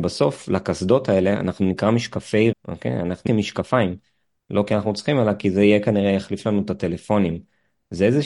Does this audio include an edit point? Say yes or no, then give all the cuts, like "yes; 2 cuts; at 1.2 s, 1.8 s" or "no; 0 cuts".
yes; 2 cuts; at 2.5 s, 3.3 s